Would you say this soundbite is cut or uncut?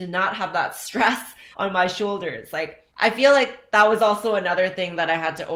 cut